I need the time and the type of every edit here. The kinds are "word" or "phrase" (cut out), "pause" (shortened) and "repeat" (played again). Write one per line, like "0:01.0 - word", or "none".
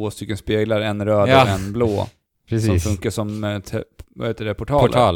none